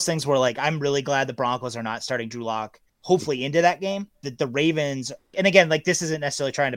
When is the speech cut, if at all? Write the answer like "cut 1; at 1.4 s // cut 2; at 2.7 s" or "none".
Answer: cut 1; at 2.9 s // cut 2; at 4.2 s // cut 3; at 5.3 s

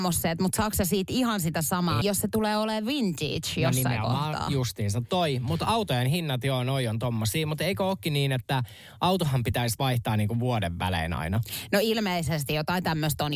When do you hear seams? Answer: cut 1; at 2.0 s

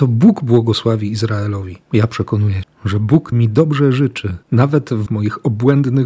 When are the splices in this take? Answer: cut 1; at 1.8 s // cut 2; at 2.6 s // cut 3; at 3.3 s // cut 4; at 4.4 s // cut 5; at 5.1 s

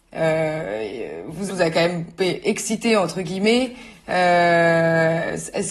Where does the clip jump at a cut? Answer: cut 1; at 1.5 s // cut 2; at 2.2 s

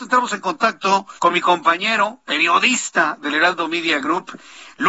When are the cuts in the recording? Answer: cut 1; at 1.2 s

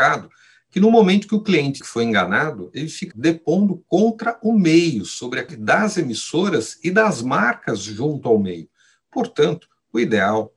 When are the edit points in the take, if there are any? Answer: cut 1; at 1.8 s // cut 2; at 3.1 s // cut 3; at 5.5 s

